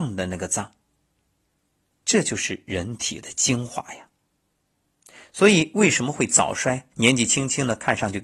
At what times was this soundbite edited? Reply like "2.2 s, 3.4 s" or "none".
6.9 s